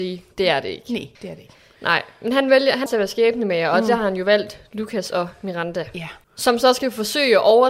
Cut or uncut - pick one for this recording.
cut